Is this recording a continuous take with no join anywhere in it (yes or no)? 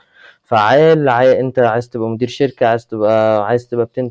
yes